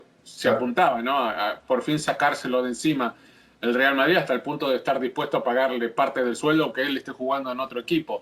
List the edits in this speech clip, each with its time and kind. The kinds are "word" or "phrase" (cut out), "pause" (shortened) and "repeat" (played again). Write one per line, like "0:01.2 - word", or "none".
none